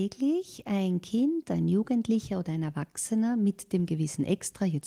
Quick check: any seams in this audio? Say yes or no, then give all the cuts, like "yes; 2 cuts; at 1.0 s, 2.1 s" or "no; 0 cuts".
no; 0 cuts